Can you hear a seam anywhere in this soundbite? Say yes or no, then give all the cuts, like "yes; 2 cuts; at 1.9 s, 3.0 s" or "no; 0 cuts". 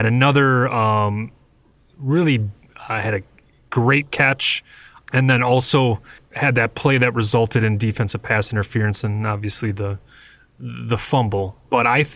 no; 0 cuts